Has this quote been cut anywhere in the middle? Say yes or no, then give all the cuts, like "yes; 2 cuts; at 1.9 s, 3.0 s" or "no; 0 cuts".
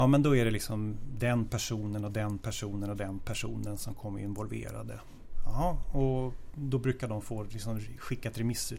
no; 0 cuts